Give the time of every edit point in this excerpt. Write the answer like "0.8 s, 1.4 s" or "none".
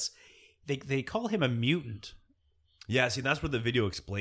none